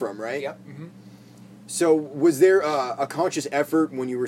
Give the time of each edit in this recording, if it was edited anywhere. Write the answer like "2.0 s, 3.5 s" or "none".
none